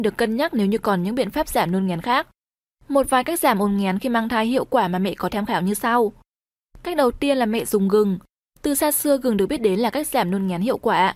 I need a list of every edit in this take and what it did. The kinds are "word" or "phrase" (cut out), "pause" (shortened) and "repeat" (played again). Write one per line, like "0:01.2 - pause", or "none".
0:05.3 - word